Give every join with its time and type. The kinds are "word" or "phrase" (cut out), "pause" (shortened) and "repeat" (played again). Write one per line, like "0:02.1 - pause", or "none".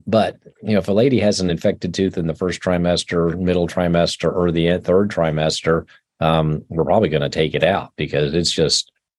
none